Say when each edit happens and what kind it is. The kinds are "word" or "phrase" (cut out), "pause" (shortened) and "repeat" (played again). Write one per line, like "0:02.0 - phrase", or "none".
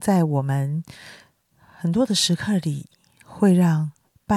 none